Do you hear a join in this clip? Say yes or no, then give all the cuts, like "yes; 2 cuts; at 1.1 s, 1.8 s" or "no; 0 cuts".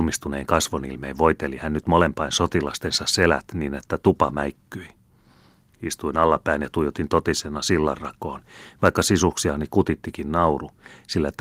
no; 0 cuts